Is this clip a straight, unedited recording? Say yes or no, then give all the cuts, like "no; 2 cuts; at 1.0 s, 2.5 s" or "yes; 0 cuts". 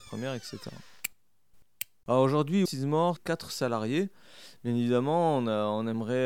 no; 2 cuts; at 2.7 s, 3.2 s